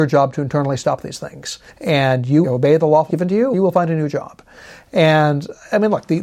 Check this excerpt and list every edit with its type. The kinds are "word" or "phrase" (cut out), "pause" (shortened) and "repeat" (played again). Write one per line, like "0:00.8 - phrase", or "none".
0:01.7 - pause
0:02.4 - phrase
0:03.1 - word
0:03.5 - word